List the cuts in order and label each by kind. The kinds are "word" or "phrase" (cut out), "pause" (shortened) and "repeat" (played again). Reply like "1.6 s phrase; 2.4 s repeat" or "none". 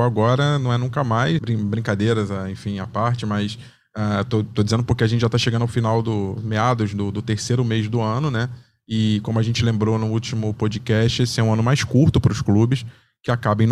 1.4 s word